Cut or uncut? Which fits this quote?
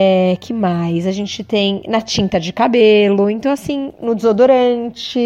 uncut